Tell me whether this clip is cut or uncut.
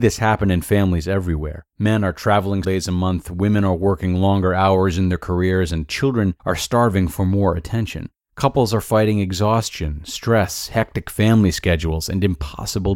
cut